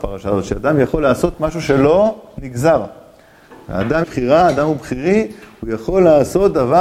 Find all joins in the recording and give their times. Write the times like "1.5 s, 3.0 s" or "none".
4.0 s